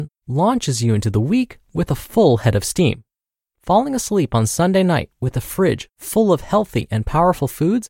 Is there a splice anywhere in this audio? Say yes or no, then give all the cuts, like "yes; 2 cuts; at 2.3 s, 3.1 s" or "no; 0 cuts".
no; 0 cuts